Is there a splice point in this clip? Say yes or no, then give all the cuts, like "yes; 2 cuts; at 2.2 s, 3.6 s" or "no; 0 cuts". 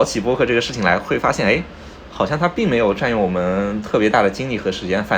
no; 0 cuts